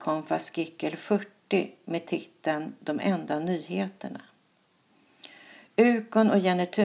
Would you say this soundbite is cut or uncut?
uncut